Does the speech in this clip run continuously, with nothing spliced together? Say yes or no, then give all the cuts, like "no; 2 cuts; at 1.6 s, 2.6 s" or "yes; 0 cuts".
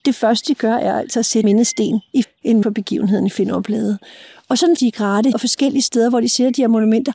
no; 5 cuts; at 1.4 s, 2.2 s, 2.6 s, 4.8 s, 5.3 s